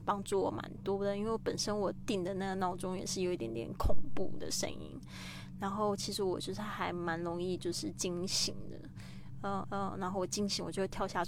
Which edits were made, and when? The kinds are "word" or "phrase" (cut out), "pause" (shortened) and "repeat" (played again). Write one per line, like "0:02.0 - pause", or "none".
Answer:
0:09.6 - repeat